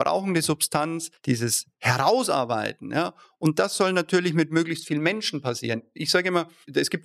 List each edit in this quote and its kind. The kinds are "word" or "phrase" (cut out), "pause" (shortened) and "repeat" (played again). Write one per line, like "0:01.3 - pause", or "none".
0:01.2 - pause